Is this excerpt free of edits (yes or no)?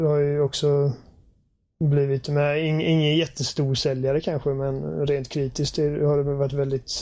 yes